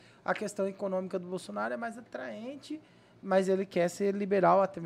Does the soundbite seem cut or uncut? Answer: uncut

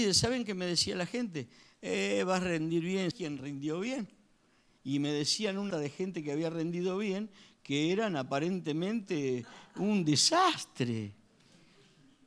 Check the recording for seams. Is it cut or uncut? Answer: cut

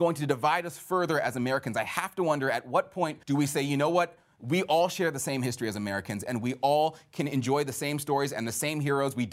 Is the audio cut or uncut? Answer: cut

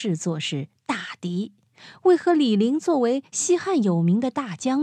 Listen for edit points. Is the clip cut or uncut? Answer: uncut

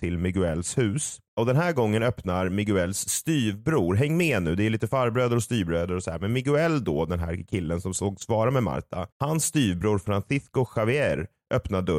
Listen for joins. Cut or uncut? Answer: cut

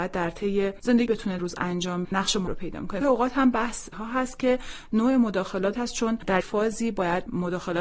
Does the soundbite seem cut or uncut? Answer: cut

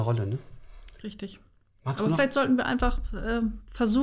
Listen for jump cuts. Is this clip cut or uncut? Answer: uncut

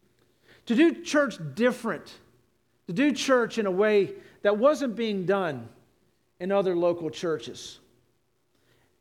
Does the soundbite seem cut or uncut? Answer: uncut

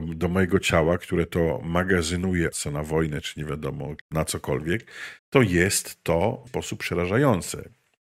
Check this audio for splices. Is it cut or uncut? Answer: cut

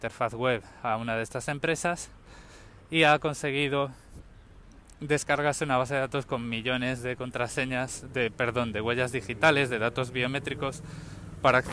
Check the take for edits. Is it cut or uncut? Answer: uncut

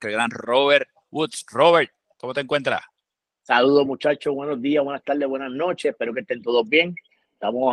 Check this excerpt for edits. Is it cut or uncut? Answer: uncut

